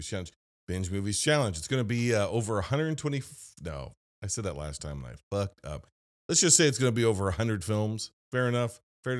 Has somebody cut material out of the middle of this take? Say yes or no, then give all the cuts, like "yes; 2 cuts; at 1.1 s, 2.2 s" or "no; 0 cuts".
yes; 1 cut; at 5.6 s